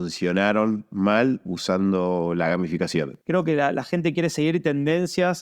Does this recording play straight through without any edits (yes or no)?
no